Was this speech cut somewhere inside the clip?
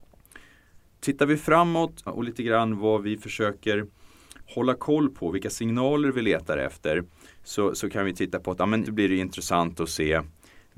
yes; 2 cuts; at 2.1 s, 8.9 s

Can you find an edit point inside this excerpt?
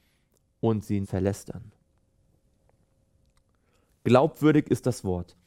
yes; 1 cut; at 1.0 s

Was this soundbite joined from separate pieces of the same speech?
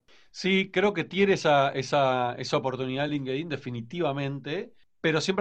no; 0 cuts

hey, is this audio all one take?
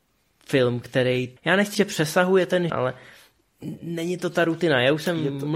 no; 3 cuts; at 1.4 s, 1.7 s, 2.7 s

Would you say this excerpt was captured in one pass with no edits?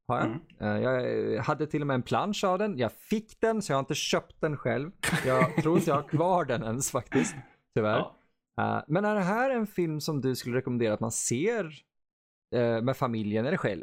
yes; 0 cuts

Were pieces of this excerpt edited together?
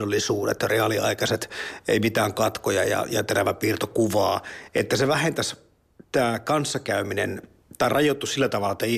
no; 0 cuts

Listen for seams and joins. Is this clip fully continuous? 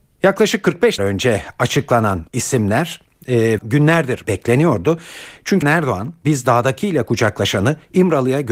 no; 5 cuts; at 1.0 s, 2.3 s, 3.6 s, 4.2 s, 5.6 s

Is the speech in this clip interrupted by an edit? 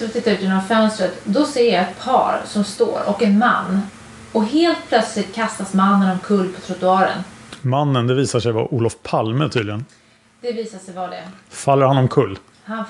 no; 0 cuts

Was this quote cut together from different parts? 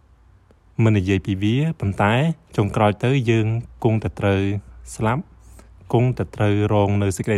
yes; 1 cut; at 2.4 s

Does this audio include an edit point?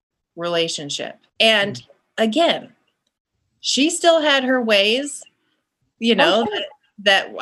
yes; 1 cut; at 1.3 s

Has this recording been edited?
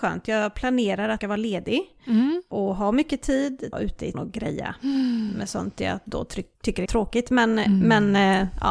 yes; 5 cuts; at 1.2 s, 3.7 s, 4.1 s, 6.5 s, 6.9 s

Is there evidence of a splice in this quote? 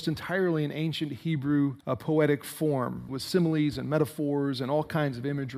yes; 2 cuts; at 1.8 s, 3.1 s

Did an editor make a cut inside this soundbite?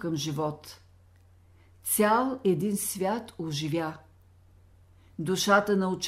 no; 0 cuts

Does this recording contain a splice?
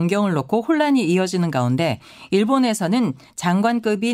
no; 0 cuts

